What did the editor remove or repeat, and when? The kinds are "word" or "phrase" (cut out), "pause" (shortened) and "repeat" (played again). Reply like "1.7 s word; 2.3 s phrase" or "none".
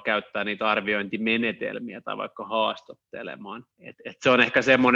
3.7 s pause